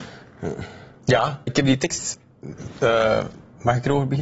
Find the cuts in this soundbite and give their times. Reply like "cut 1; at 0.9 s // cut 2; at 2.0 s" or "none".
cut 1; at 1.5 s